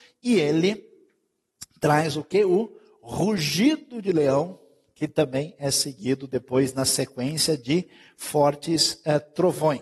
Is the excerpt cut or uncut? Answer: uncut